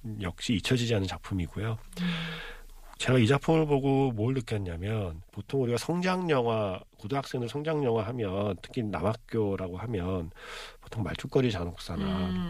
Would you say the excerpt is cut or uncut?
cut